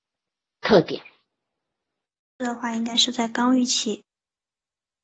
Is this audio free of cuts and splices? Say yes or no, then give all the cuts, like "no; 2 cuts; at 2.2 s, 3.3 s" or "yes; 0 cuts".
yes; 0 cuts